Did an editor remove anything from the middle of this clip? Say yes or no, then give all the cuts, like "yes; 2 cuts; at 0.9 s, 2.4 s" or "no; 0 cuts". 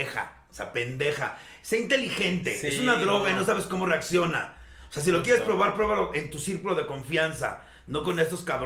no; 0 cuts